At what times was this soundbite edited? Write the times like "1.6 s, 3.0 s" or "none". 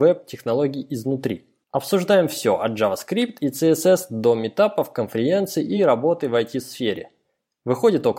none